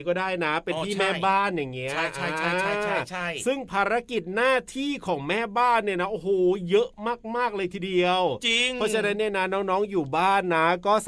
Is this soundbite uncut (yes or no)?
yes